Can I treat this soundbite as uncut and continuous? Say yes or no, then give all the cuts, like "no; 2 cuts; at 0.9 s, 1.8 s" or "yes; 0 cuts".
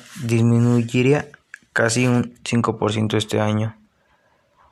yes; 0 cuts